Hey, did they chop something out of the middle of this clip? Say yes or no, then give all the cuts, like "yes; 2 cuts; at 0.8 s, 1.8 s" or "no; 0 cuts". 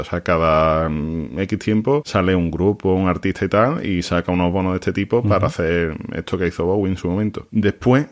no; 0 cuts